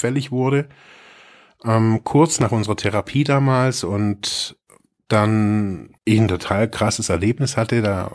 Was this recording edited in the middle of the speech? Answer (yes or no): yes